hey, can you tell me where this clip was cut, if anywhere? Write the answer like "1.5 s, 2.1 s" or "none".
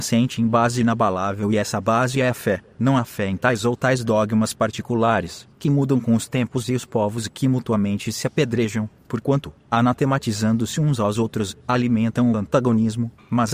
5.5 s